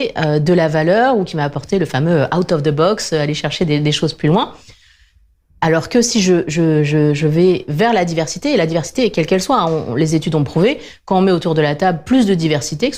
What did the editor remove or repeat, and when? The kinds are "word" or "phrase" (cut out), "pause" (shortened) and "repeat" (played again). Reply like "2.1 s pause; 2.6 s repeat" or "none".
none